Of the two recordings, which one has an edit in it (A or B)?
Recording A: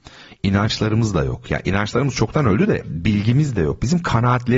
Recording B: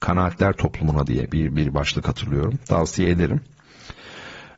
B